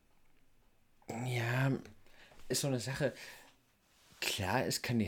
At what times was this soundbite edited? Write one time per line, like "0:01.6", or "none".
0:02.5